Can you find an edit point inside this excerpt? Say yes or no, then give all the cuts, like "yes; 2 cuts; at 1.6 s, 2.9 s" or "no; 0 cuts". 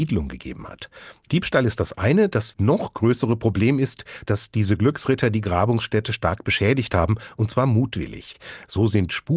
yes; 1 cut; at 2.5 s